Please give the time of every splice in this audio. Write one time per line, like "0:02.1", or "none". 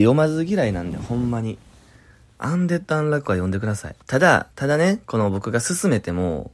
0:04.0
0:04.5